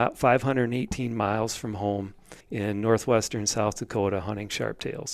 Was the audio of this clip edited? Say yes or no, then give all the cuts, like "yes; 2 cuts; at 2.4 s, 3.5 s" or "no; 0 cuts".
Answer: yes; 1 cut; at 2.4 s